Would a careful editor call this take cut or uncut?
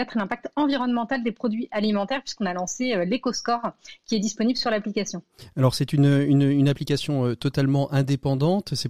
uncut